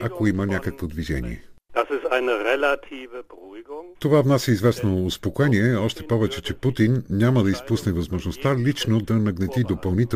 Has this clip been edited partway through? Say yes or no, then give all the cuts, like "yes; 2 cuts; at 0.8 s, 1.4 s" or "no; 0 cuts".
yes; 1 cut; at 3.9 s